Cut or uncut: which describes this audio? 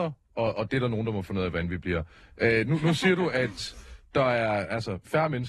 uncut